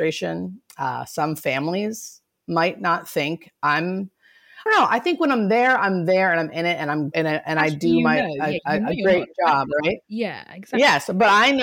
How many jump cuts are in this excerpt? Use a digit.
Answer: 3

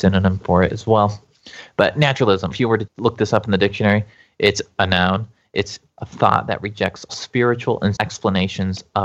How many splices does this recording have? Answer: 5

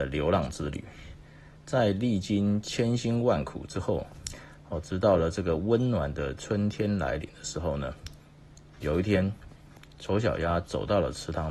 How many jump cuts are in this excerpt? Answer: 1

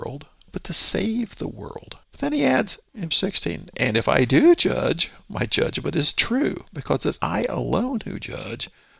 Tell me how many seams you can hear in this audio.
3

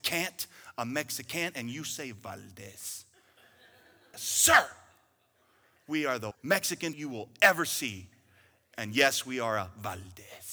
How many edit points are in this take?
3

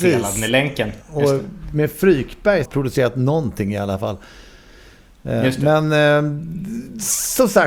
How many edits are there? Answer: 2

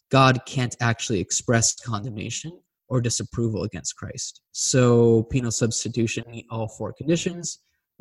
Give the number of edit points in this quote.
2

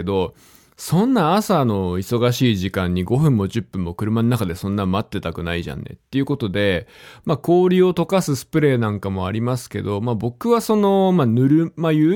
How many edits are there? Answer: 0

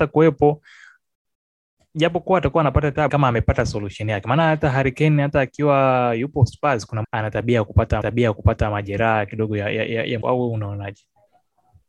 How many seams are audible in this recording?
4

